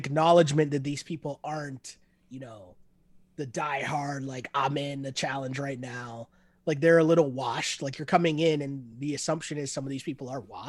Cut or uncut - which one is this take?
uncut